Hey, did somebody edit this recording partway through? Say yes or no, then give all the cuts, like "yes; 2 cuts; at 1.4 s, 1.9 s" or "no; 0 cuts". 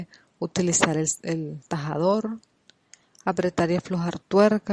no; 0 cuts